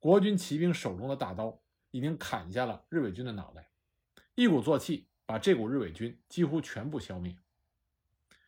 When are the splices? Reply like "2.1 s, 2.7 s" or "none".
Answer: none